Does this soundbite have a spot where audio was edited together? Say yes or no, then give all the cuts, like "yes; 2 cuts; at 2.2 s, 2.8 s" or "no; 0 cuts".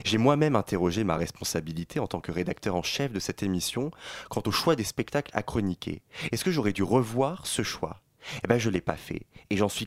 no; 0 cuts